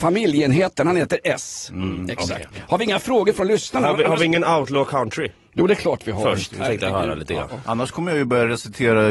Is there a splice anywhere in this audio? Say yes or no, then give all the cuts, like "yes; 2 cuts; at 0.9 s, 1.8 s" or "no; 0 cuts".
no; 0 cuts